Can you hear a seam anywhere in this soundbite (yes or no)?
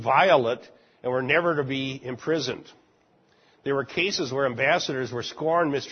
no